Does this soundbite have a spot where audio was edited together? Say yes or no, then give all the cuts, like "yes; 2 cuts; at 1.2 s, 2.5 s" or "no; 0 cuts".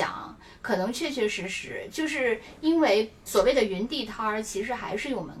yes; 1 cut; at 3.3 s